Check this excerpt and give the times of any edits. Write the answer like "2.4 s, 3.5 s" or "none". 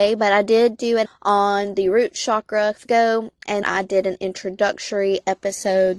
1.1 s, 2.9 s, 3.6 s